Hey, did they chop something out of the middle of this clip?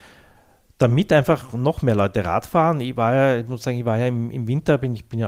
no; 0 cuts

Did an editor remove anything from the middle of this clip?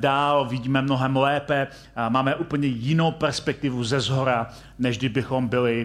no; 0 cuts

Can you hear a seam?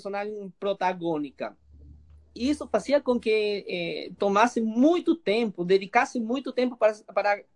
no; 0 cuts

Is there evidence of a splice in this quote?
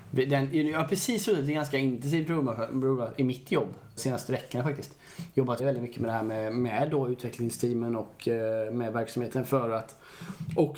yes; 2 cuts; at 4.0 s, 5.6 s

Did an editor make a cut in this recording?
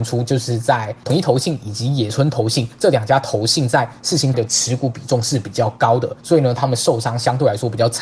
yes; 1 cut; at 4.3 s

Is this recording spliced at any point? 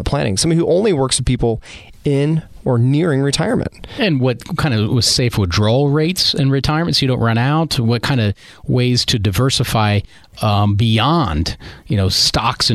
no; 0 cuts

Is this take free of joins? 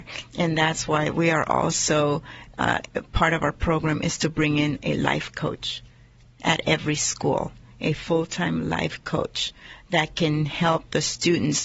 yes; 0 cuts

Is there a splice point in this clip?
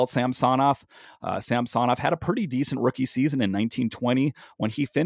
no; 0 cuts

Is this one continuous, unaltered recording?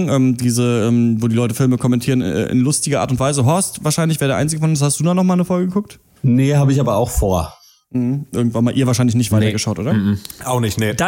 yes; 0 cuts

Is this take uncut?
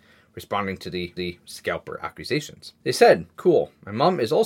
no; 3 cuts; at 1.2 s, 2.8 s, 3.3 s

